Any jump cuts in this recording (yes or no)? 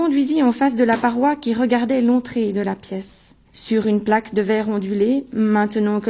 yes